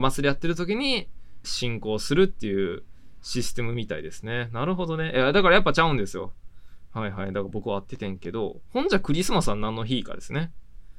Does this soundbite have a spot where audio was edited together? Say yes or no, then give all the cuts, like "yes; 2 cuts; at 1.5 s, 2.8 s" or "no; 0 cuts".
yes; 1 cut; at 1.4 s